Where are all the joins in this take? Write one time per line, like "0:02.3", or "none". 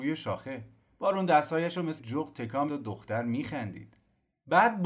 0:02.0
0:02.7